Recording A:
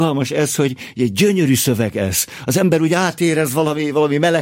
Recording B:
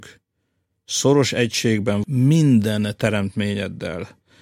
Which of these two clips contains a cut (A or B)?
B